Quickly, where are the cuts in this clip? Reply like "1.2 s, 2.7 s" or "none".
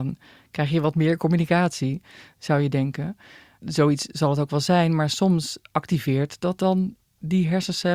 none